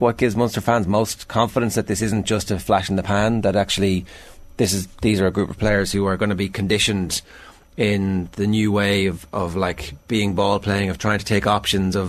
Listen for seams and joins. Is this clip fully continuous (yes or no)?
yes